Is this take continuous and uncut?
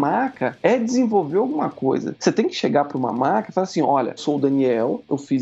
no; 1 cut; at 4.2 s

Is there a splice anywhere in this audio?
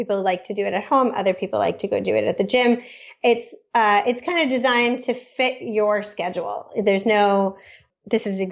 no; 0 cuts

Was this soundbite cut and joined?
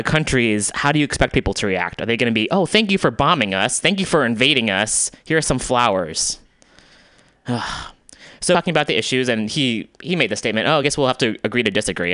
no; 0 cuts

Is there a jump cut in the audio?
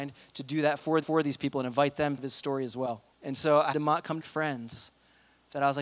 yes; 5 cuts; at 1.0 s, 2.2 s, 3.1 s, 3.7 s, 4.2 s

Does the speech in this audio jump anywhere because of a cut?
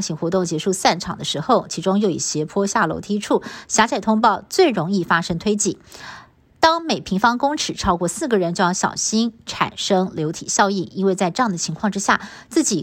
no; 0 cuts

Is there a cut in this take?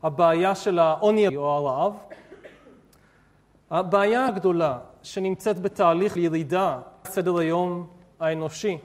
yes; 4 cuts; at 1.3 s, 4.3 s, 6.2 s, 7.0 s

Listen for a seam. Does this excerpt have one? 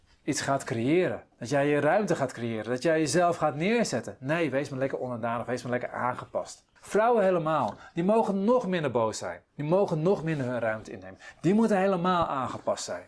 yes; 3 cuts; at 1.3 s, 6.8 s, 9.5 s

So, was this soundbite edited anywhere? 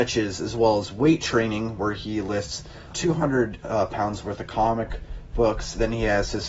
yes; 1 cut; at 2.9 s

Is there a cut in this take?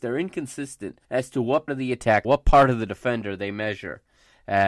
yes; 3 cuts; at 1.0 s, 1.7 s, 2.2 s

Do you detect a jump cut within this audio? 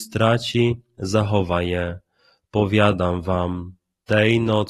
no; 0 cuts

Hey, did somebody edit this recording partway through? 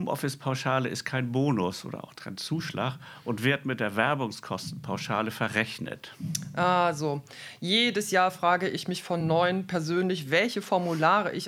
no; 0 cuts

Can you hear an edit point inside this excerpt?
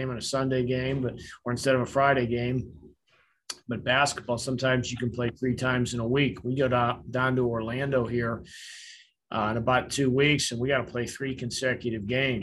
no; 0 cuts

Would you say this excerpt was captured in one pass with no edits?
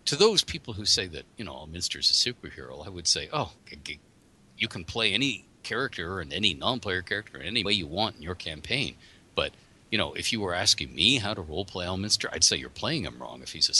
no; 2 cuts; at 3.6 s, 7.7 s

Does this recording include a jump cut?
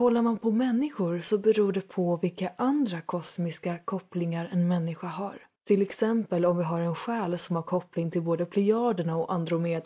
yes; 1 cut; at 5.6 s

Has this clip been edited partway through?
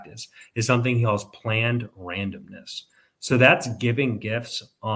no; 0 cuts

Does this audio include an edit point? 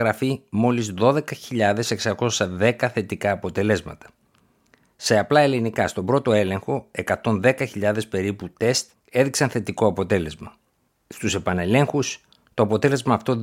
no; 0 cuts

